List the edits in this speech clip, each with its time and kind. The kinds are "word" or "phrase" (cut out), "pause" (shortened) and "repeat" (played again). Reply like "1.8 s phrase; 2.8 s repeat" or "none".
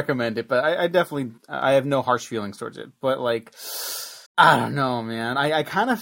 1.4 s pause; 4.3 s pause